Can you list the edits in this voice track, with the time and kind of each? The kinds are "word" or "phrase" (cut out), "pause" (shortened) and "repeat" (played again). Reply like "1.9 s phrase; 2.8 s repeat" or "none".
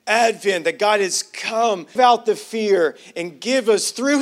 2.0 s phrase